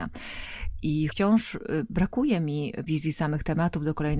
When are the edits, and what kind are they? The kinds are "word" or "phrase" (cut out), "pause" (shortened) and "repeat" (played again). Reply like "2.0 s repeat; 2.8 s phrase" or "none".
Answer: 1.1 s word; 2.9 s word